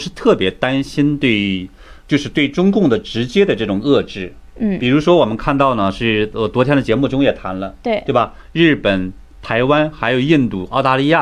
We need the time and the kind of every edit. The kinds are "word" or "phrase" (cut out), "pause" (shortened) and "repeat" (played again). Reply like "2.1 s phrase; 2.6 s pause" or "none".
2.0 s word